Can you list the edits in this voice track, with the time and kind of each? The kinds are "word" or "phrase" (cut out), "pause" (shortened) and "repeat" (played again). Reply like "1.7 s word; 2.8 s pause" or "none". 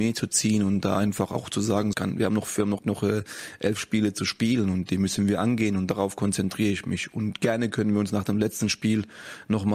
1.9 s word; 2.8 s word